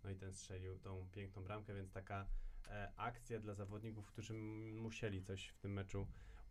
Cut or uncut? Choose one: uncut